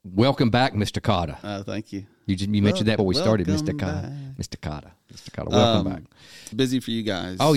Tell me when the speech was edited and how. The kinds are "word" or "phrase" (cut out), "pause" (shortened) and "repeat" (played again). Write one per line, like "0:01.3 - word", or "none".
0:03.0 - word
0:06.5 - phrase